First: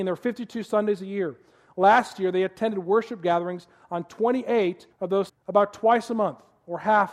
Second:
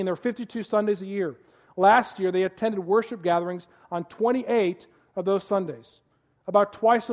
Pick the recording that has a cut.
first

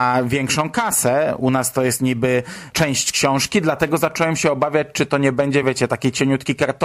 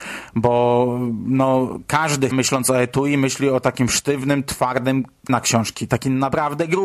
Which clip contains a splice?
second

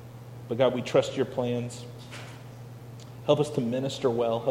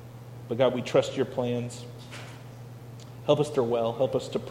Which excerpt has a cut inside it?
second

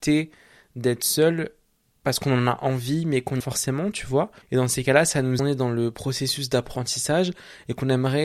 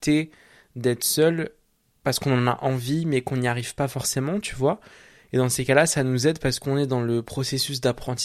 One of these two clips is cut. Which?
first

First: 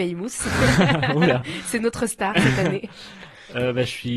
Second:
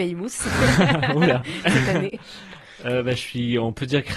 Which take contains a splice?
second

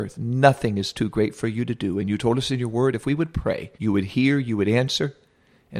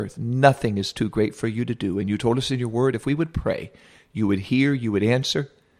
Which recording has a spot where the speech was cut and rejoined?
first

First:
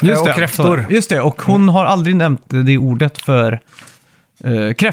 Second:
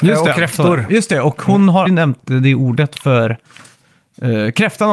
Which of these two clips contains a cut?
second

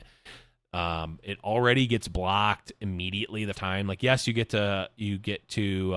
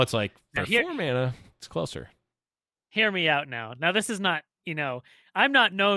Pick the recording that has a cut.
first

